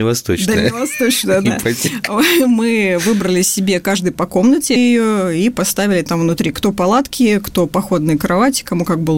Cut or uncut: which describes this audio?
cut